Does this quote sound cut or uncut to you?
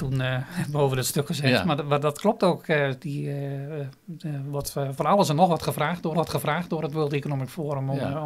cut